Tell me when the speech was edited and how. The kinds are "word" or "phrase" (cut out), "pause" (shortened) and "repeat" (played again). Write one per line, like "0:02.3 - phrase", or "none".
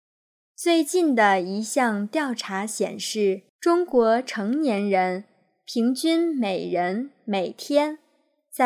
0:03.5 - pause